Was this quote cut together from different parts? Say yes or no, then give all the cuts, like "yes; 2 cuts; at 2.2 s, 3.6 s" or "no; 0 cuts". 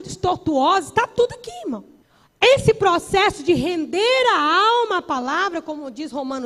yes; 1 cut; at 2.0 s